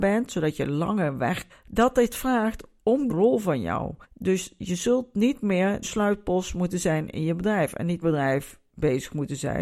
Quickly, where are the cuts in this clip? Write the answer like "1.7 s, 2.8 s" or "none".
1.5 s, 3.1 s, 4.0 s, 5.8 s, 8.0 s